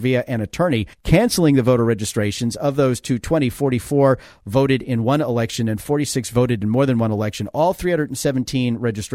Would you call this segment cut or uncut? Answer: cut